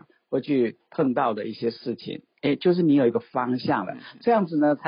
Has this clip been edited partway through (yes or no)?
no